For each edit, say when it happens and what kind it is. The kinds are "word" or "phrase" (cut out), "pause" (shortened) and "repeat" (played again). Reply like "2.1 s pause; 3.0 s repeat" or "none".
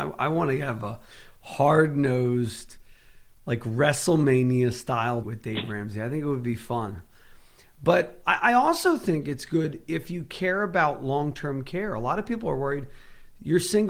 5.2 s word